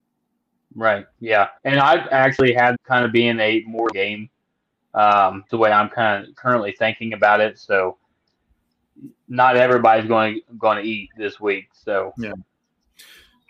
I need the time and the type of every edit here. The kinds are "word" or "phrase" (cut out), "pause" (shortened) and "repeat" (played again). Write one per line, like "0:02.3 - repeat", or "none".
0:01.6 - pause
0:02.1 - word
0:02.7 - word
0:03.9 - phrase
0:05.5 - word